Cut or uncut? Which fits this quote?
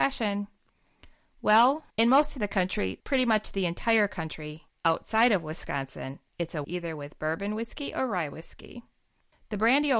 cut